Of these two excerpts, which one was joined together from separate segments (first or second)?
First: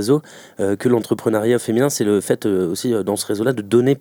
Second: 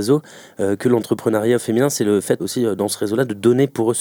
second